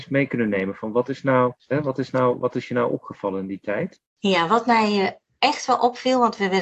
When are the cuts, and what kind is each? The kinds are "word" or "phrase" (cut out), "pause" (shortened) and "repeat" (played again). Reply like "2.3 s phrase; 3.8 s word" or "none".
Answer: 1.6 s pause; 4.1 s pause